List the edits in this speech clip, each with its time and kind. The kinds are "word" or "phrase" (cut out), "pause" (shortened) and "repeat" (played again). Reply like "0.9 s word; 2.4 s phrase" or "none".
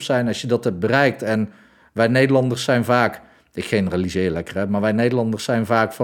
none